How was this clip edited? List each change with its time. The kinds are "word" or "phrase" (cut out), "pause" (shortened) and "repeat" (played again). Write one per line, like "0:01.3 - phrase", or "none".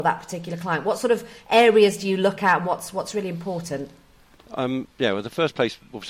none